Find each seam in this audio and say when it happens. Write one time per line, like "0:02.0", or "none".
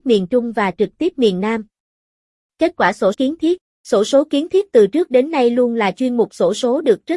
0:03.1